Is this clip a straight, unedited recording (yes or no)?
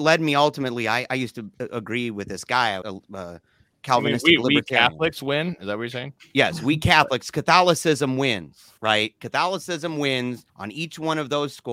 no